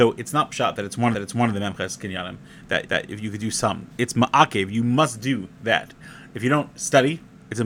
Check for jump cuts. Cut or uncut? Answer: cut